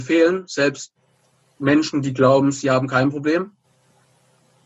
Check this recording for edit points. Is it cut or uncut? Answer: uncut